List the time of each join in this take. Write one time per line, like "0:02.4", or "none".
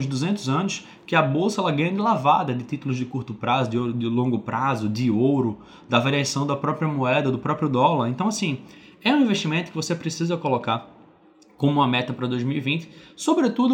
none